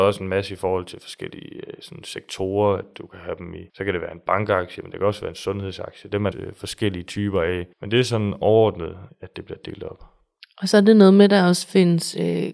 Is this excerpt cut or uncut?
cut